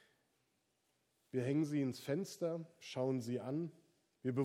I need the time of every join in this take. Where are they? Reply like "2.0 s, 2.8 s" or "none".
none